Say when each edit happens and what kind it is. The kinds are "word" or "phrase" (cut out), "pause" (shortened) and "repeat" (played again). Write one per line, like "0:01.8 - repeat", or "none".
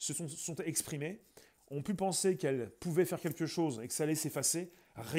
none